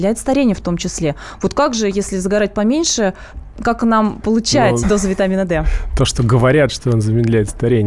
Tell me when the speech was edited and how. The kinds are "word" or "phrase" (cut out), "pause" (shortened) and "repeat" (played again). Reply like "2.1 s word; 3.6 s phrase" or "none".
4.2 s word; 4.8 s word